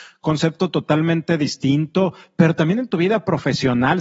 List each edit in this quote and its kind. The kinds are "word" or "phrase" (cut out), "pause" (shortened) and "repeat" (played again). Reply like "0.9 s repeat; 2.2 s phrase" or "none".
none